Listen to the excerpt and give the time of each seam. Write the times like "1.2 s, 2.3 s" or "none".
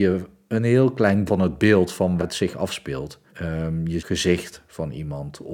1.3 s, 2.2 s, 3.3 s, 4.0 s